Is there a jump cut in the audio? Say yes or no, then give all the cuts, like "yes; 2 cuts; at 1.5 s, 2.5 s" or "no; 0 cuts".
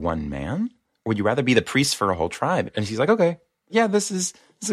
no; 0 cuts